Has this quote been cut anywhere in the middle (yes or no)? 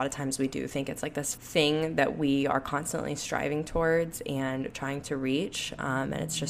yes